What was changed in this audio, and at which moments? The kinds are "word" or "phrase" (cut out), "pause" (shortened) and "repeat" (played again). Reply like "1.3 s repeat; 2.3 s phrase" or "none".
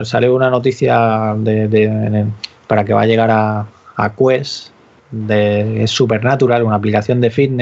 none